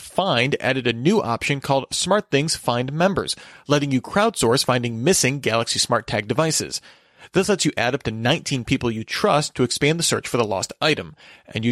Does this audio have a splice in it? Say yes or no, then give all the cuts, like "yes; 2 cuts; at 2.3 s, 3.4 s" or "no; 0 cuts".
no; 0 cuts